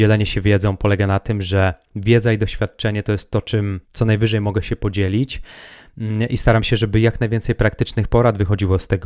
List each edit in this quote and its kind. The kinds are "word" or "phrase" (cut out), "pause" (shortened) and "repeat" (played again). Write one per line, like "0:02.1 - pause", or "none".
0:03.8 - pause